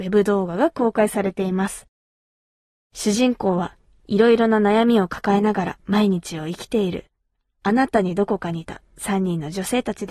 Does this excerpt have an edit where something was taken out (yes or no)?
no